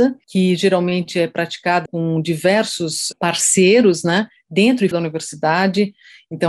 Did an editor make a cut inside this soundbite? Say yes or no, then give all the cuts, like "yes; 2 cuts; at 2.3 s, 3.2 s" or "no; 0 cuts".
yes; 3 cuts; at 1.9 s, 3.1 s, 4.9 s